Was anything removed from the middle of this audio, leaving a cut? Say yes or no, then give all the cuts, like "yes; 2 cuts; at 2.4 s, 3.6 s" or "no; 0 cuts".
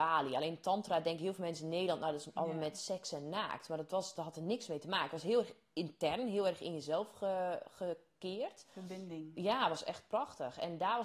no; 0 cuts